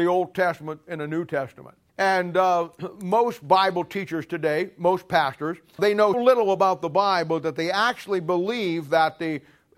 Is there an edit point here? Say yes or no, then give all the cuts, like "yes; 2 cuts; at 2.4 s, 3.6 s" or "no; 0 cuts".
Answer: yes; 3 cuts; at 1.9 s, 5.8 s, 6.1 s